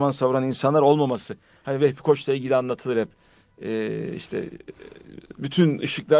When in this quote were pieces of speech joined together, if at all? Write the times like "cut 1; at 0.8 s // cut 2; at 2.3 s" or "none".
none